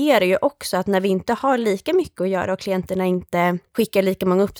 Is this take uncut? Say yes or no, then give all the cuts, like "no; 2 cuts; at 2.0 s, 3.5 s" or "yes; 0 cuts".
yes; 0 cuts